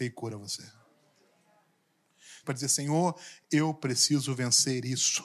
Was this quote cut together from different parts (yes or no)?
yes